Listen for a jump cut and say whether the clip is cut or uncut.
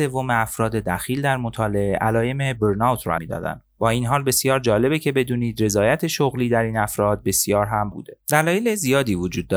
cut